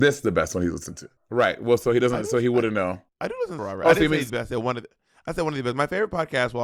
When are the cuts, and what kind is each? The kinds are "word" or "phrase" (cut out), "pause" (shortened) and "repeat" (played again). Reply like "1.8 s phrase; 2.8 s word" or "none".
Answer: 1.2 s pause; 3.1 s pause; 3.6 s phrase; 4.3 s word